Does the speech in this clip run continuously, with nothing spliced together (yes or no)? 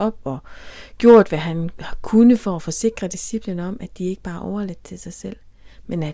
yes